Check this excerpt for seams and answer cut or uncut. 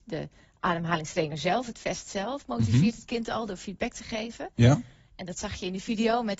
uncut